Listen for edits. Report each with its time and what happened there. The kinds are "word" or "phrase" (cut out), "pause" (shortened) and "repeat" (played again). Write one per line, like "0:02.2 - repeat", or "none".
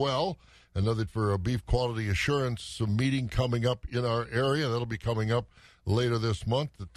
0:01.1 - word

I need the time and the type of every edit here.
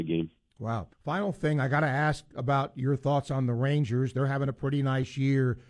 0:00.9 - pause

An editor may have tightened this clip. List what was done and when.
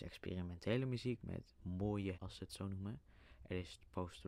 0:01.6 - word
0:02.1 - word

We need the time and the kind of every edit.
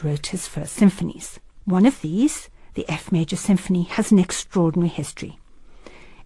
none

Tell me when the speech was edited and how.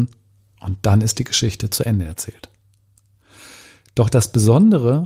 none

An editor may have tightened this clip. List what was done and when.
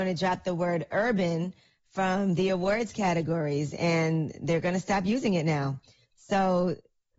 none

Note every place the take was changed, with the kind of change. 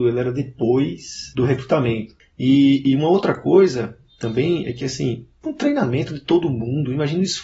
0:05.4 - word

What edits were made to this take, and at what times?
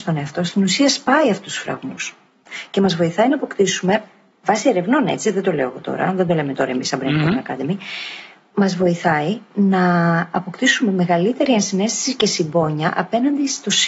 none

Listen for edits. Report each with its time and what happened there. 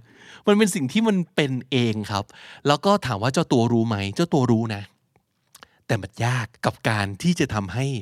0:06.6 - pause

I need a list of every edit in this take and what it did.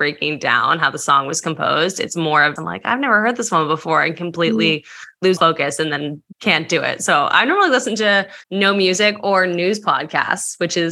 0:02.6 - word
0:05.4 - word
0:06.3 - pause
0:08.4 - pause

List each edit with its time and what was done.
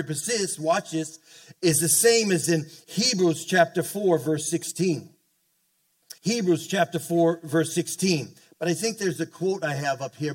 0:06.2 - pause

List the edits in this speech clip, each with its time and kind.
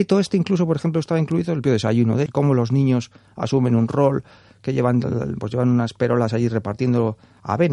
0:01.6 - word
0:02.3 - word
0:05.4 - word

